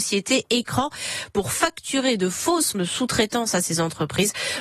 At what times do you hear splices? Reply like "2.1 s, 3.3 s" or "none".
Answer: 2.7 s